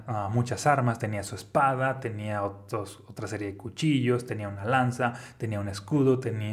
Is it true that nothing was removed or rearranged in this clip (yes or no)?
yes